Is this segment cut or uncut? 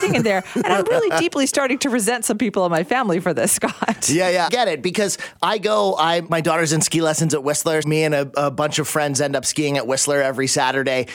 cut